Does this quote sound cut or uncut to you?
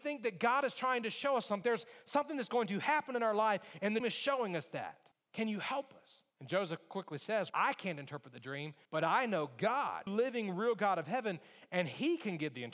cut